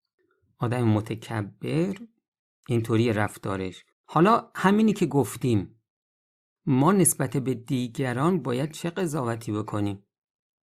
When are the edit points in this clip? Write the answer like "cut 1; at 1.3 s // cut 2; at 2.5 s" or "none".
cut 1; at 3.9 s